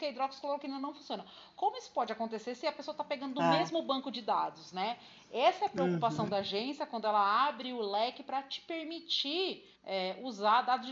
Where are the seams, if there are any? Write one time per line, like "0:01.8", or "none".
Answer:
0:09.8